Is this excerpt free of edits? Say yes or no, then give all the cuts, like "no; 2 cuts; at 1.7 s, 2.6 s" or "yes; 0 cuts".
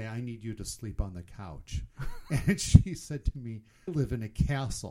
no; 1 cut; at 3.9 s